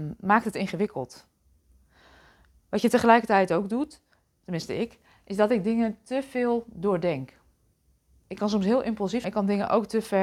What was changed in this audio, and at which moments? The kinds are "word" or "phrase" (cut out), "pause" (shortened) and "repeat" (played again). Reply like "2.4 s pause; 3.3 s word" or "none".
9.2 s phrase